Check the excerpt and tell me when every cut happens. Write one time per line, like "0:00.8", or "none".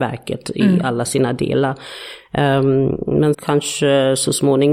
0:03.3